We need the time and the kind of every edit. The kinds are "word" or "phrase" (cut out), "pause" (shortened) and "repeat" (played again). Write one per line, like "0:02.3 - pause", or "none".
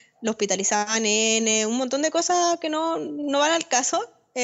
none